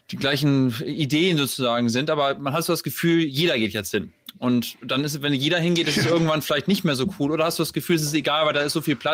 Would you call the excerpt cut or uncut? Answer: uncut